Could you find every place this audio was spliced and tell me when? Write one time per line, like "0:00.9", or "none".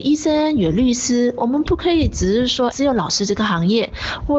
0:02.7